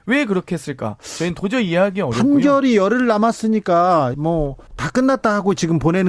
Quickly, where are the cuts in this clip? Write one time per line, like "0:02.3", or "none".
0:04.1
0:04.7